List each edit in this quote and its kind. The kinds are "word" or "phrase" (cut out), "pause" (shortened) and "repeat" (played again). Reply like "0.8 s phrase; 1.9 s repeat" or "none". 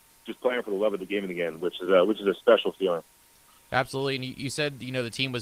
none